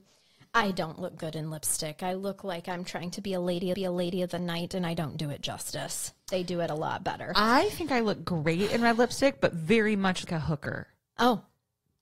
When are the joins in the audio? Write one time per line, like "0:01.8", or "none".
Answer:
0:03.7
0:06.2
0:10.3